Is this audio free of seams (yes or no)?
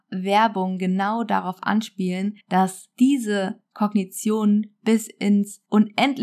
no